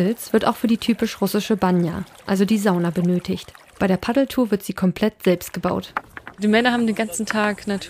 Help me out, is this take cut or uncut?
uncut